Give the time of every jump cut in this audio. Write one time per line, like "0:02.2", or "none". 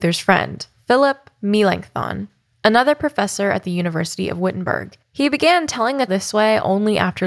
0:05.0
0:06.1